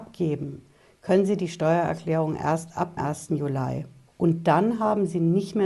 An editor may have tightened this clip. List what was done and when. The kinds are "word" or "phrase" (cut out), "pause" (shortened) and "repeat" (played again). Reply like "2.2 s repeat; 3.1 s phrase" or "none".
3.0 s word; 4.1 s pause

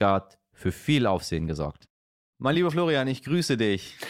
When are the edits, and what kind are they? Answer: none

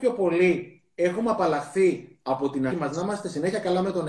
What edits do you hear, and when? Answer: 2.7 s word

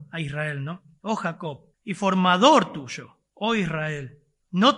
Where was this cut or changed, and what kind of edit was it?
1.7 s pause

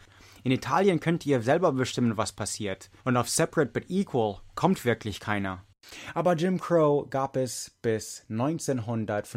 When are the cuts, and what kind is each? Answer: 3.0 s pause; 4.5 s pause

